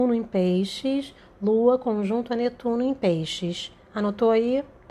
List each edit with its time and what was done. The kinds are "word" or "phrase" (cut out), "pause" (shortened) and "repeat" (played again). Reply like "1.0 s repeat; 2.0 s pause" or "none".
none